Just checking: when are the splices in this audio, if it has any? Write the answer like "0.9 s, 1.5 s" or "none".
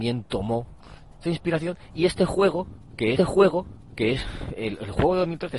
1.2 s, 3.2 s